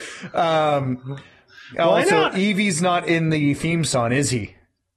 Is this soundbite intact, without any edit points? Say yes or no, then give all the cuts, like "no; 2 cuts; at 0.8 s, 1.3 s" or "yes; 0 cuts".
yes; 0 cuts